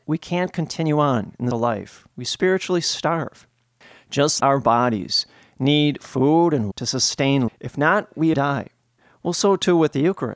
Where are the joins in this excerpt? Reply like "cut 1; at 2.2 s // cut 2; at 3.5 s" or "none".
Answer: cut 1; at 1.5 s // cut 2; at 4.4 s // cut 3; at 6.7 s // cut 4; at 7.5 s // cut 5; at 8.3 s